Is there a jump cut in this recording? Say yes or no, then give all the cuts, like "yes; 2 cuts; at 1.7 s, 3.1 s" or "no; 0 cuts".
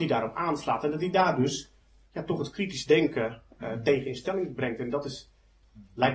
no; 0 cuts